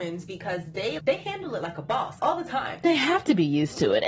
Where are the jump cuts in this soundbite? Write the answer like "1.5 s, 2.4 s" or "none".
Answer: 1.0 s, 2.2 s, 2.8 s